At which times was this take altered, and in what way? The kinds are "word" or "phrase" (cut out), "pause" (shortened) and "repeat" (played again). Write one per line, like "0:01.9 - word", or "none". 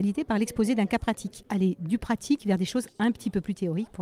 0:02.9 - pause